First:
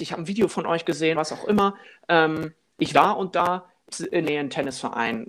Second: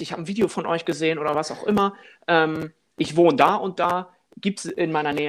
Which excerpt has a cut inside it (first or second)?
first